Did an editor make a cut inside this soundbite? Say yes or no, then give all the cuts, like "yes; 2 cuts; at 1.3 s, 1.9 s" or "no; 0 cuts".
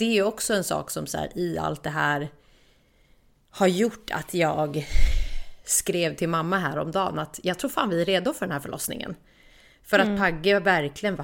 no; 0 cuts